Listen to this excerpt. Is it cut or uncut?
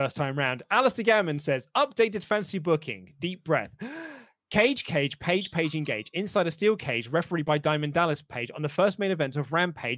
uncut